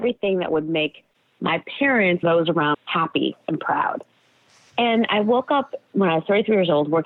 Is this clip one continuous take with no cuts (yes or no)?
no